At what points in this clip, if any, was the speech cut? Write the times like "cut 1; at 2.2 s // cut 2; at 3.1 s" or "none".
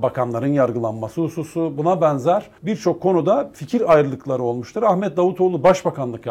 cut 1; at 2.6 s